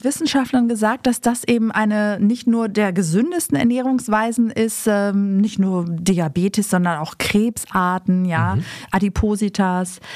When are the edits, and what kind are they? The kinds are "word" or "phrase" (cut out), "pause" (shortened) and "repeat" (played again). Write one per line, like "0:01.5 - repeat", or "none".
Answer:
none

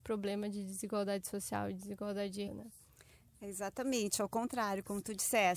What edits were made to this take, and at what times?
0:02.5 - word

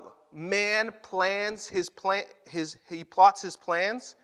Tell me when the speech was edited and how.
none

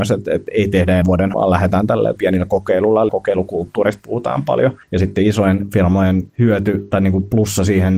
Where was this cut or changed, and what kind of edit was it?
0:01.0 - word
0:01.3 - word
0:02.2 - word
0:03.1 - phrase
0:04.8 - pause
0:06.3 - pause

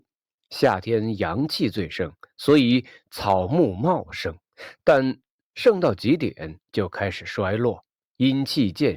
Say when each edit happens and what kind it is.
none

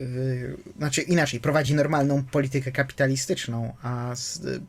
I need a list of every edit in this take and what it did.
none

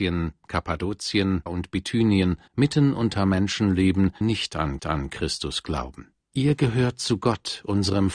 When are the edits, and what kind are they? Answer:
0:01.5 - word
0:02.5 - pause
0:04.2 - word
0:04.8 - repeat
0:06.2 - pause

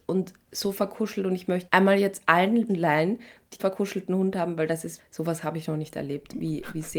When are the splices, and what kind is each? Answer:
0:01.7 - word
0:02.7 - word
0:03.6 - word
0:05.0 - word

